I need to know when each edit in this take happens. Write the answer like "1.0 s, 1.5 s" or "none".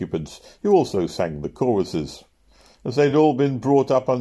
none